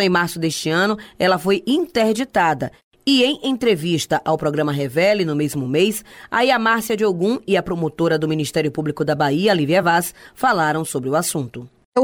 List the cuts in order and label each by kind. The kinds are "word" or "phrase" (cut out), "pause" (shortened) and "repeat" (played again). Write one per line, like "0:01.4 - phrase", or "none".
none